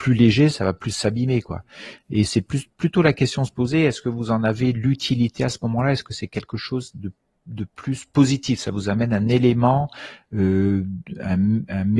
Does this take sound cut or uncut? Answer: uncut